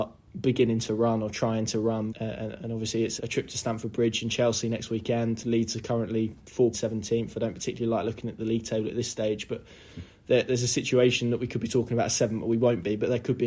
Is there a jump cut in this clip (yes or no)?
yes